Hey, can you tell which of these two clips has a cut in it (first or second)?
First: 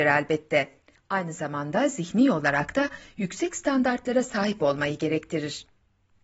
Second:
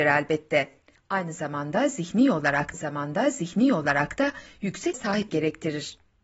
second